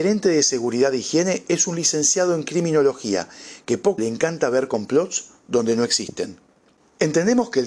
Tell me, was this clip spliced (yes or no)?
yes